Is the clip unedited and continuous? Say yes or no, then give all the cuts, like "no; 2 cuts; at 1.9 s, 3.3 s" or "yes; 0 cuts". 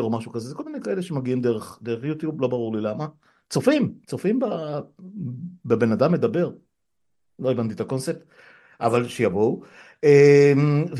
yes; 0 cuts